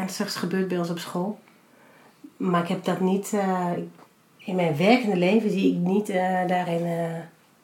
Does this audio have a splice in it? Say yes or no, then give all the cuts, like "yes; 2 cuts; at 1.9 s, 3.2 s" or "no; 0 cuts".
no; 0 cuts